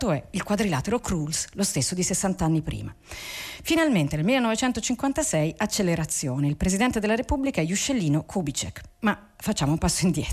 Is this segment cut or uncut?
uncut